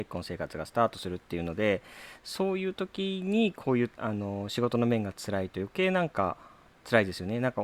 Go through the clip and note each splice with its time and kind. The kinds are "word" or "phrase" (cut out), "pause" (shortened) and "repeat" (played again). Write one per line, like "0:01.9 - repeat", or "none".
0:03.9 - pause